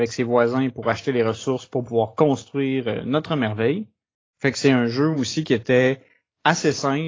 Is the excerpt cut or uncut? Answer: uncut